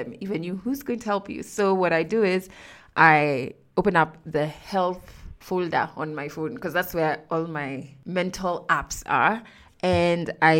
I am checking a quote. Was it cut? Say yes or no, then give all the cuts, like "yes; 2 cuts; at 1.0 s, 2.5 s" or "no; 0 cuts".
no; 0 cuts